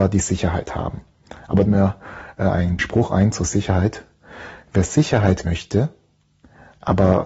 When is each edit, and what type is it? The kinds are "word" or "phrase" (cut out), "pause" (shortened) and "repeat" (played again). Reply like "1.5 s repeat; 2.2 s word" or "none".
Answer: 1.6 s phrase; 2.8 s word; 5.4 s word